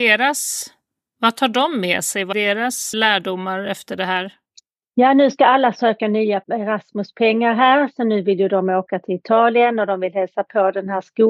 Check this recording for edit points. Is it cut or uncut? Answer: cut